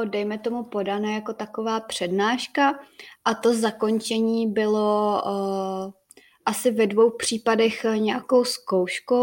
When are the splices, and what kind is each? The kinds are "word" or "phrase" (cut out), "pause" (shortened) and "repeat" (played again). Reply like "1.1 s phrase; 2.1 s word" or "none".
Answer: none